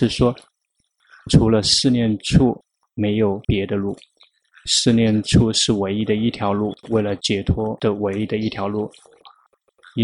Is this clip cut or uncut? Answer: cut